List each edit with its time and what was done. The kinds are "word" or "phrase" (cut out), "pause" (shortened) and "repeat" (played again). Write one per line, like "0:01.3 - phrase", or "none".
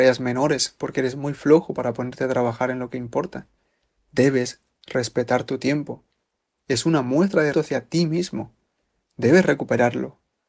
0:07.5 - word